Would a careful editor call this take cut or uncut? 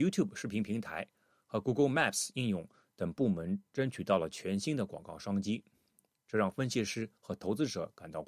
uncut